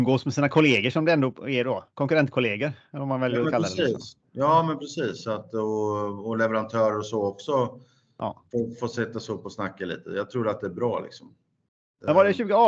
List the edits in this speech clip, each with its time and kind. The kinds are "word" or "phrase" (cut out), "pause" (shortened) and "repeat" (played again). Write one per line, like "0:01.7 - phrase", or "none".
none